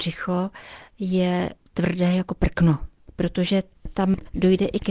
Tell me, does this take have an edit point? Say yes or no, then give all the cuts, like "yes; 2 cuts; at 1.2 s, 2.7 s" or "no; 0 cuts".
no; 0 cuts